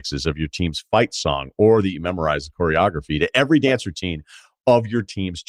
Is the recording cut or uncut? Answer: uncut